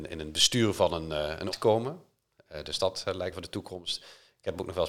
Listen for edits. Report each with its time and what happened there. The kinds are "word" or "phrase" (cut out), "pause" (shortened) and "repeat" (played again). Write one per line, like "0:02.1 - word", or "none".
0:01.5 - word
0:03.3 - phrase